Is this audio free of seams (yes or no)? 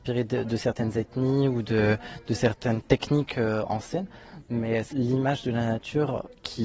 no